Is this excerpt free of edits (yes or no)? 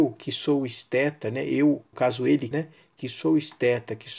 no